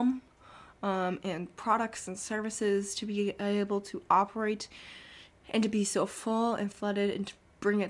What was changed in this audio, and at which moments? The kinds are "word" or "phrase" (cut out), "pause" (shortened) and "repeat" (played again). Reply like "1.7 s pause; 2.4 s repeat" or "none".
none